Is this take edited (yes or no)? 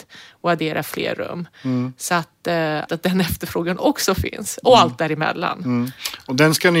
yes